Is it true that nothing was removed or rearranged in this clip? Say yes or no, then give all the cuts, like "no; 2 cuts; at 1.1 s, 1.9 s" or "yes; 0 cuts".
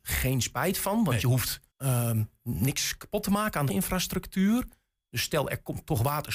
no; 2 cuts; at 1.7 s, 3.7 s